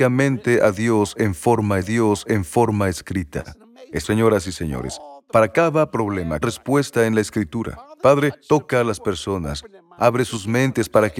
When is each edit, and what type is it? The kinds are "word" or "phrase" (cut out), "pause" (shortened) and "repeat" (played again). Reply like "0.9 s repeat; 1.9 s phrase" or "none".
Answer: 1.8 s repeat; 4.0 s word; 6.4 s phrase

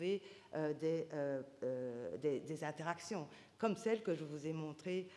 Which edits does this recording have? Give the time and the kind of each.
none

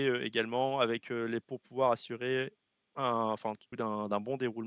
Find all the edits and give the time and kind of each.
1.4 s word; 2.8 s pause; 3.6 s pause

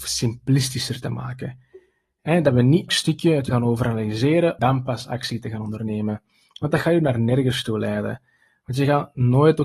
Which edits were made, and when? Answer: 2.9 s word; 3.5 s word; 4.6 s word

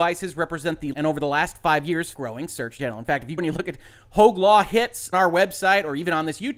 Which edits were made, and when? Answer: 0.9 s word; 2.1 s word; 2.8 s word; 3.4 s word; 5.1 s word

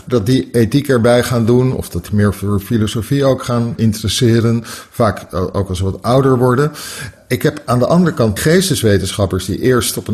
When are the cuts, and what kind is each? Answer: 2.1 s word; 8.4 s word

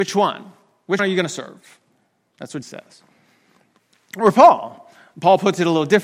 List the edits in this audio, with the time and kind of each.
1.0 s word; 2.6 s word

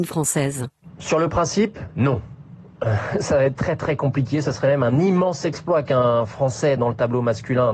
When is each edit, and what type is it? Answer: none

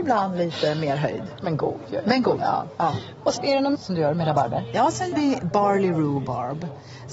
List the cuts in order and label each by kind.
3.4 s word; 3.7 s word; 5.1 s word

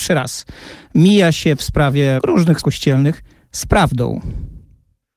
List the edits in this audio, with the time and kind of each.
2.2 s word; 2.6 s word

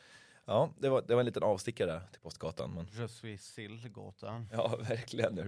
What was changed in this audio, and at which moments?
none

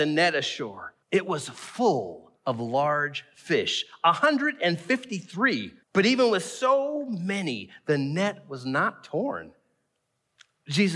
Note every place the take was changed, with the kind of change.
1.0 s pause; 2.4 s pause; 5.8 s pause

